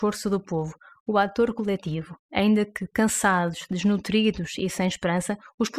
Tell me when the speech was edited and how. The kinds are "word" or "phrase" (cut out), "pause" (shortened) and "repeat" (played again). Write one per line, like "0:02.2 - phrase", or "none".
0:02.2 - pause